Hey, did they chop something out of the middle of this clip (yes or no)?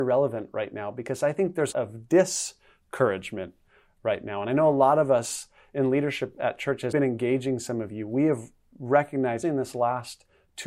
yes